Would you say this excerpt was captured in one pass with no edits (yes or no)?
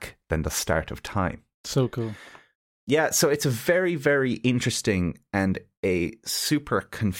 yes